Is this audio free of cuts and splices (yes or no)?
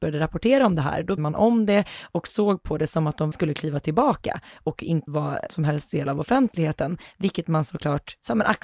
no